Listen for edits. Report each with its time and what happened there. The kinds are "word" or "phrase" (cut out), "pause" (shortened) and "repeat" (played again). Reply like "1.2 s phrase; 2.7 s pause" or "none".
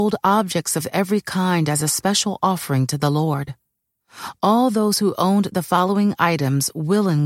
none